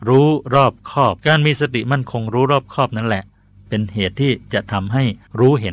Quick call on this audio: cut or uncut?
cut